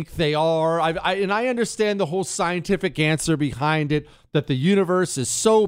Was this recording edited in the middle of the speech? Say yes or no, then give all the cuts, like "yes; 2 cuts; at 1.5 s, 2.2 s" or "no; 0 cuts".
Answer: no; 0 cuts